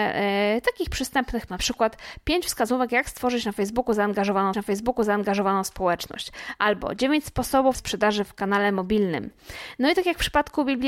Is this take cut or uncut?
cut